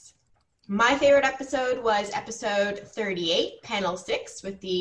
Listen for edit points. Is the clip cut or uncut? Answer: uncut